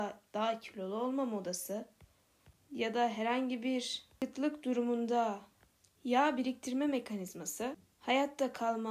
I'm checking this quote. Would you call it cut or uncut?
uncut